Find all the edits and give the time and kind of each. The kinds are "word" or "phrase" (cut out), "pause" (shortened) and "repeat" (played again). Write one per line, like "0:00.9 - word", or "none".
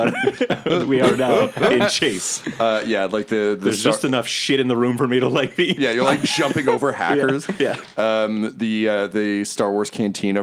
none